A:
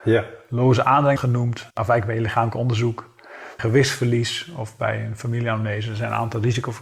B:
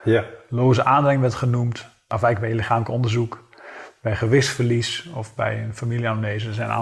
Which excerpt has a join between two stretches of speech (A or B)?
A